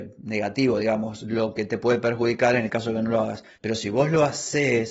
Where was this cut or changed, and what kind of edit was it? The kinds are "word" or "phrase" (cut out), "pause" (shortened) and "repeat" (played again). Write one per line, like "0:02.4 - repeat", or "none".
0:03.5 - pause

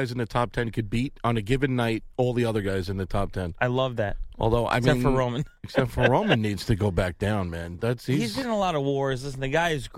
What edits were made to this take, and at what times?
0:05.6 - pause

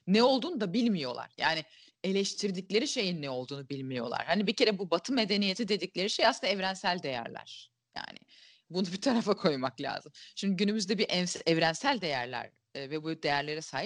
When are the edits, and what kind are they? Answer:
none

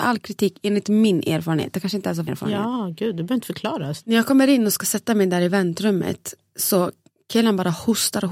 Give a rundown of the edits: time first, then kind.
0:02.3 - phrase

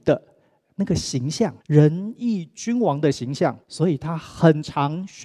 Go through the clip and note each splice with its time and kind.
0:01.6 - pause
0:03.6 - pause

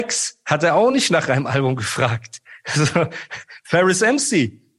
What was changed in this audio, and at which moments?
none

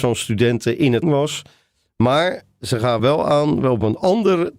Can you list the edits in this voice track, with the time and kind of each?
0:01.0 - word
0:03.0 - word

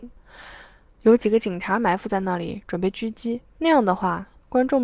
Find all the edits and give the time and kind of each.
0:03.5 - pause

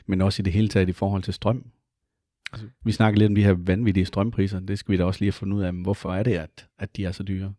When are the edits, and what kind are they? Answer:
none

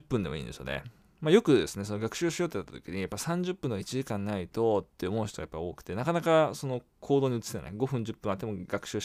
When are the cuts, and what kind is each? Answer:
none

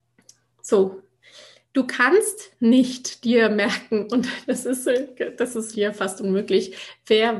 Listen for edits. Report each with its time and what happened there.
0:05.7 - word

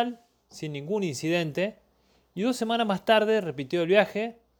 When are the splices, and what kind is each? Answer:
none

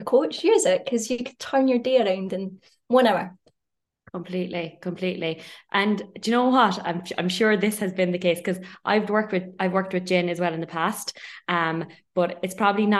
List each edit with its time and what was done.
none

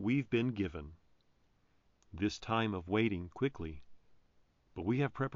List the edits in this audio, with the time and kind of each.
0:03.3 - word

